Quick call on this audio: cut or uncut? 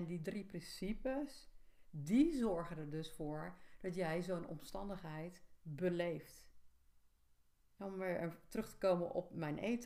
uncut